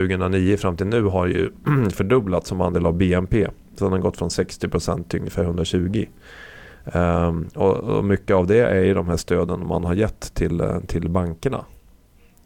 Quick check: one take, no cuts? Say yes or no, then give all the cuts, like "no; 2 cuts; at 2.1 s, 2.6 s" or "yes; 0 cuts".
yes; 0 cuts